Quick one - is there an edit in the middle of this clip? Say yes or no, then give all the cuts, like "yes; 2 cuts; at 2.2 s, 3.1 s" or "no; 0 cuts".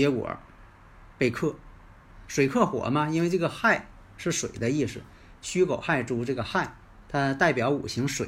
no; 0 cuts